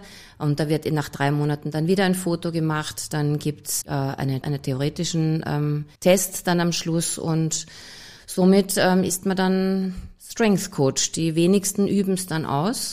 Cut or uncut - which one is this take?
cut